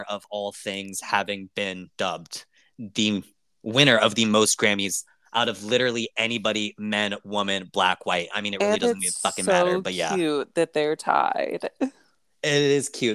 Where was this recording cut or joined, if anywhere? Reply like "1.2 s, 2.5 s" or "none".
none